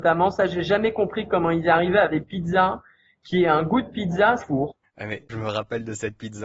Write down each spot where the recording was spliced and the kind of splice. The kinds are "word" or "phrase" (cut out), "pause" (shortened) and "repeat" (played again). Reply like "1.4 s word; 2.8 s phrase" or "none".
2.1 s word; 4.4 s word; 5.3 s word